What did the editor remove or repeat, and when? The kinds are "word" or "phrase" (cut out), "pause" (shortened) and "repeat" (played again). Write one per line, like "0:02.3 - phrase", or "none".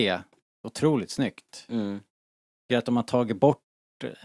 0:02.7 - word